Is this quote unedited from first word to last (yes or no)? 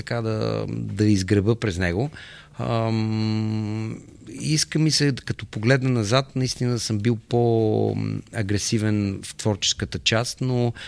yes